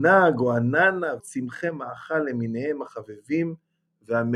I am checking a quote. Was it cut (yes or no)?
yes